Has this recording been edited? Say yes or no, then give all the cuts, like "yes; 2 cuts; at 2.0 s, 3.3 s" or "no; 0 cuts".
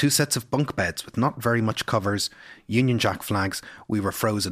no; 0 cuts